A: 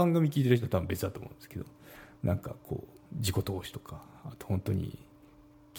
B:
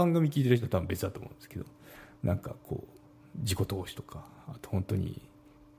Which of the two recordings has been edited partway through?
A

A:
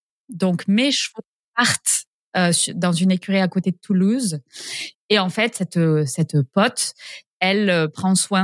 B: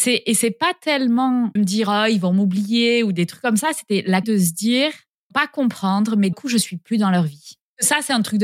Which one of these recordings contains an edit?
B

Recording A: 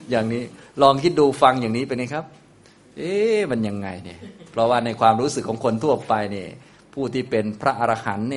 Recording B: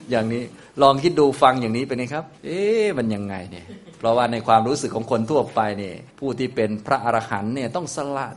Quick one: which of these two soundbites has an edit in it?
B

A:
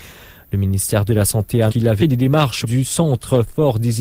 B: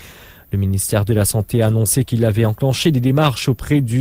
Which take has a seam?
A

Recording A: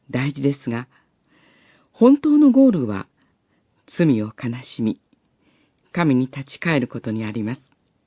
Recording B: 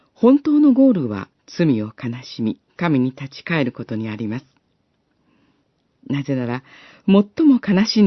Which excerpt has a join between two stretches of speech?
B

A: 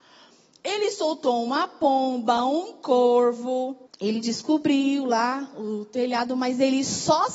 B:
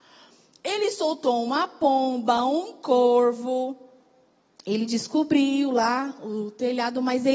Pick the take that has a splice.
A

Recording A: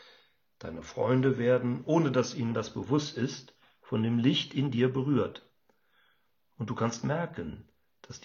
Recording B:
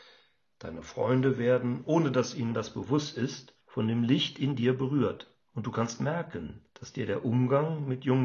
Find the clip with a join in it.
B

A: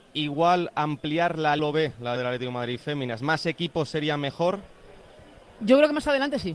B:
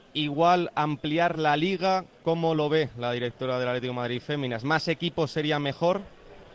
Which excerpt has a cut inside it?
A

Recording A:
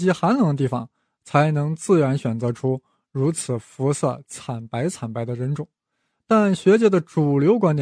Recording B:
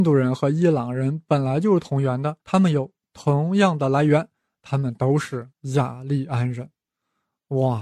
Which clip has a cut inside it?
B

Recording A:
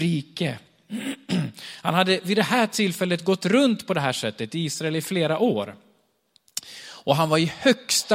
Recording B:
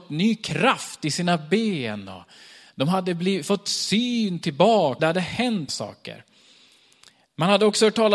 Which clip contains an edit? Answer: B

